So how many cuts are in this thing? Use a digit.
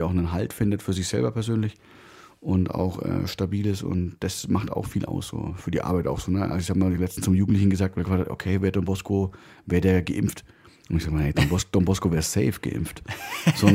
0